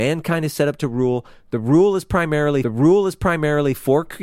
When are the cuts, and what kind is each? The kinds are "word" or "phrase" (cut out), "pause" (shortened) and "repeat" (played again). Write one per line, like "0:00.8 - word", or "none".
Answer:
0:02.6 - repeat